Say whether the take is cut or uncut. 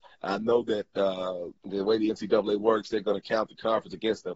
cut